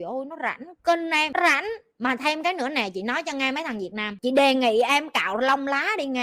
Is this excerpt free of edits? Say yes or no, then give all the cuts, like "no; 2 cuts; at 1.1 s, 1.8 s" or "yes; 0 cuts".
yes; 0 cuts